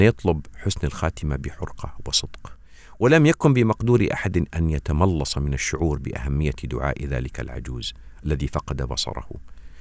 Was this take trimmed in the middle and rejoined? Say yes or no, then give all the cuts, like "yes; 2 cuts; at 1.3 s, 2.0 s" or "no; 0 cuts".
no; 0 cuts